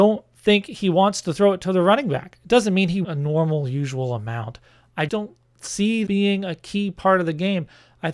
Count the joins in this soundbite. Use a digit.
3